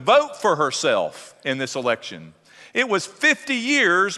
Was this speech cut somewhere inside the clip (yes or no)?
no